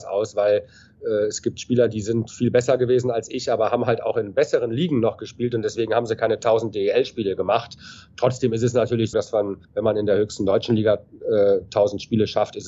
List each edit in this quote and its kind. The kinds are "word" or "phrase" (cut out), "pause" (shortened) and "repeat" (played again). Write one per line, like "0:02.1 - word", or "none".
0:09.1 - word
0:09.6 - pause